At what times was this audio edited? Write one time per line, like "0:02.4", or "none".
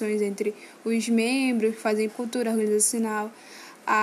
0:02.1